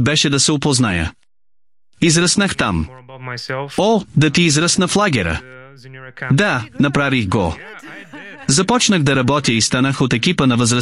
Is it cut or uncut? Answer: uncut